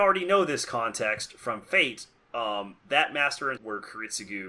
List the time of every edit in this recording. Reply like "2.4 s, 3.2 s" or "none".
3.6 s